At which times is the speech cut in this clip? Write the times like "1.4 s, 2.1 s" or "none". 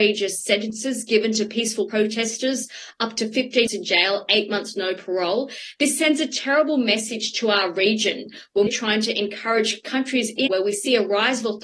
1.9 s, 3.7 s, 8.7 s, 10.5 s